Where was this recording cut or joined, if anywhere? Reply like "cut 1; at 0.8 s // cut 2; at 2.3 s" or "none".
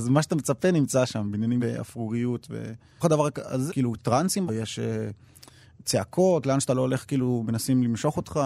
cut 1; at 1.6 s // cut 2; at 3.0 s // cut 3; at 3.7 s // cut 4; at 4.5 s